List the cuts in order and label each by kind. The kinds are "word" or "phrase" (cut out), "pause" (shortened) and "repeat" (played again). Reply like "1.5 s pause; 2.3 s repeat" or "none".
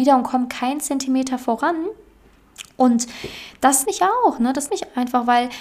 3.8 s word; 4.7 s word